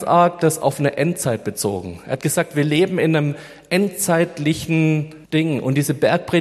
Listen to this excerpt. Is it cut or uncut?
cut